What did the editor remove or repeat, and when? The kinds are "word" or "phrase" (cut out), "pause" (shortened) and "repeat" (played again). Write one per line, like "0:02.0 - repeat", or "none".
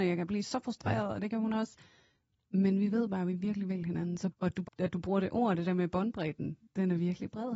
0:04.3 - word
0:04.6 - word